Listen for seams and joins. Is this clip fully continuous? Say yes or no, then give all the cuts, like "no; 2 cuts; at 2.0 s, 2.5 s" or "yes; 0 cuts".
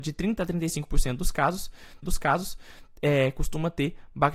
no; 1 cut; at 2.0 s